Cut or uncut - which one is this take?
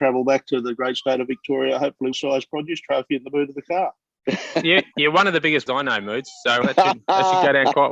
cut